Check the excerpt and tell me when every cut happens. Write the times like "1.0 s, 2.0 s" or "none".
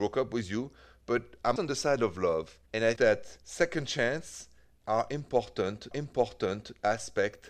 1.6 s, 2.7 s, 3.0 s, 3.4 s, 5.9 s